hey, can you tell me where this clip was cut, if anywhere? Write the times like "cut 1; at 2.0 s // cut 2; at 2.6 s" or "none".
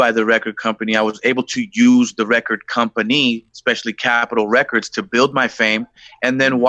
cut 1; at 3.5 s